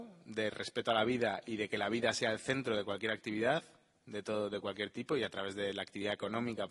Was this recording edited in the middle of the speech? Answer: no; 0 cuts

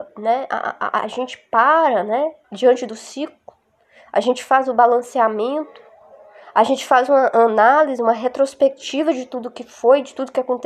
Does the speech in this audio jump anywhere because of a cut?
yes; 1 cut; at 2.4 s

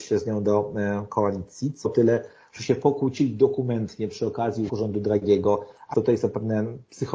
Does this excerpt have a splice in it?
yes; 3 cuts; at 1.8 s, 4.7 s, 5.9 s

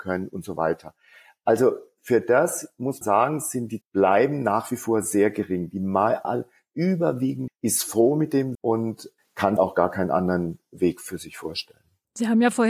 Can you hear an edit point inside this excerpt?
yes; 6 cuts; at 3.0 s, 3.8 s, 6.2 s, 7.5 s, 8.5 s, 9.6 s

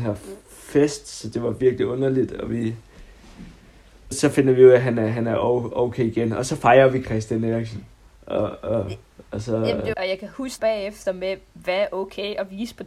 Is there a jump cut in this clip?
yes; 4 cuts; at 4.1 s, 9.3 s, 9.9 s, 10.6 s

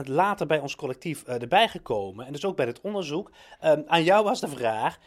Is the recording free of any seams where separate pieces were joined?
yes; 0 cuts

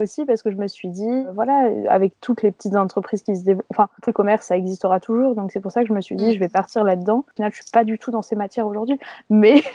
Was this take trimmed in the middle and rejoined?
yes; 2 cuts; at 4.1 s, 7.4 s

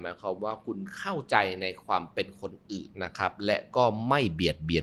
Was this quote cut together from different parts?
yes; 1 cut; at 2.9 s

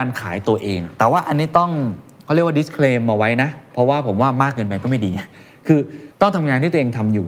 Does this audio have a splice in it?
no; 0 cuts

